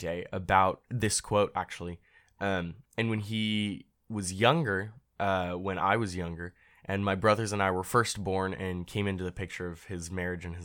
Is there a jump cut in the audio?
no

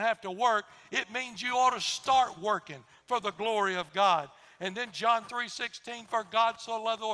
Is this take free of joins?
yes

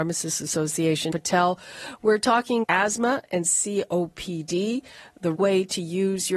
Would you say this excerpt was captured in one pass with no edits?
no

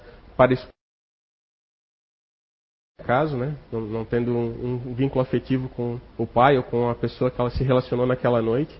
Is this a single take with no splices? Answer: no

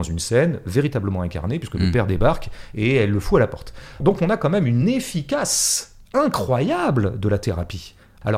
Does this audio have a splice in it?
no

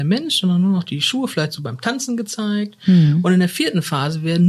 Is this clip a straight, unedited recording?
yes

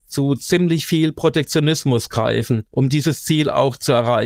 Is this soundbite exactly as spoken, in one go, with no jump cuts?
no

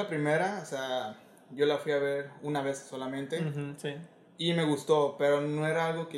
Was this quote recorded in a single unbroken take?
yes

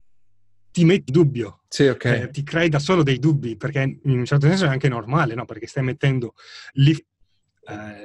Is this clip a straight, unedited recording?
no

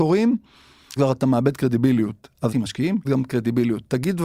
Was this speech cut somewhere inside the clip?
yes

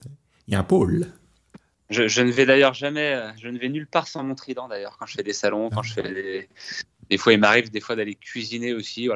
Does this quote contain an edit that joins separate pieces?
no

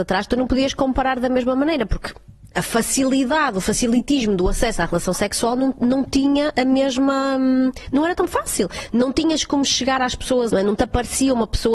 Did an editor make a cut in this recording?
yes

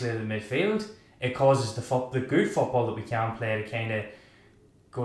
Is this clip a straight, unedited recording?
yes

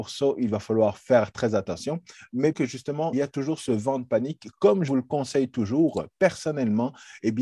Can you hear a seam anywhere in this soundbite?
yes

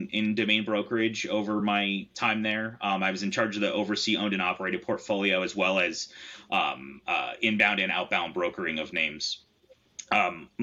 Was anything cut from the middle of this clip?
no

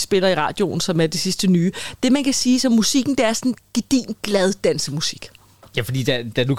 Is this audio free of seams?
yes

